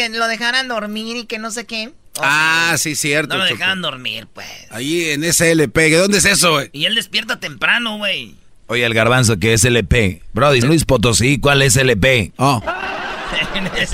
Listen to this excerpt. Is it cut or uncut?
cut